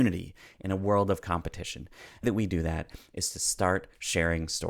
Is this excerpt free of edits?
no; 1 cut; at 2.2 s

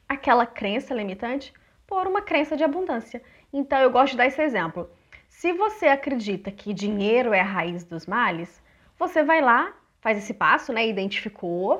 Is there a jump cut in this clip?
no; 0 cuts

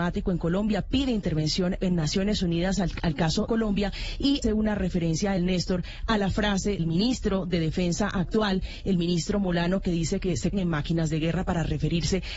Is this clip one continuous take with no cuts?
no; 6 cuts; at 1.8 s, 3.5 s, 4.4 s, 5.4 s, 6.8 s, 10.5 s

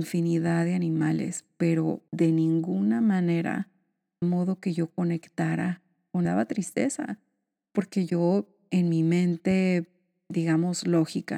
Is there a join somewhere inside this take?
yes; 3 cuts; at 2.1 s, 4.2 s, 6.2 s

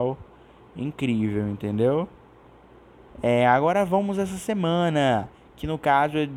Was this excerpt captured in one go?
yes; 0 cuts

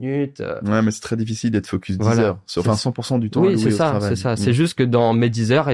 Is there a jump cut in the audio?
no; 0 cuts

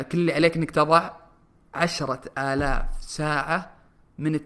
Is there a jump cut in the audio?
no; 0 cuts

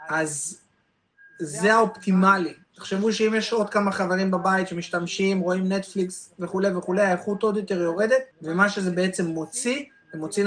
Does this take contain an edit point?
yes; 2 cuts; at 2.6 s, 8.3 s

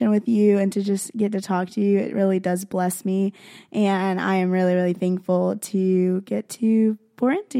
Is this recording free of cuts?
yes; 0 cuts

